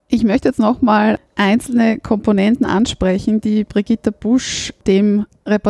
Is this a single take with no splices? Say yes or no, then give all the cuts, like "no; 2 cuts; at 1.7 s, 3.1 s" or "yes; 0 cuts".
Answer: no; 1 cut; at 1.3 s